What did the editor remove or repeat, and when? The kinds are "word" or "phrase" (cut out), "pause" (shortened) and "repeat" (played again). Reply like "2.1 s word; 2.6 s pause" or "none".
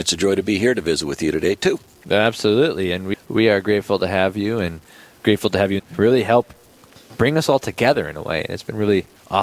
3.1 s word; 5.8 s phrase